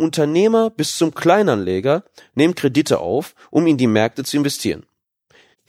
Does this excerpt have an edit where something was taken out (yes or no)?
no